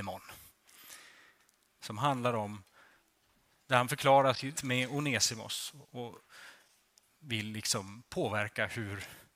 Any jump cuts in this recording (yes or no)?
yes